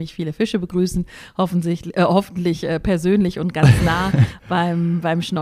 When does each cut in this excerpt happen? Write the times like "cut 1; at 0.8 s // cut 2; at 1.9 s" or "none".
none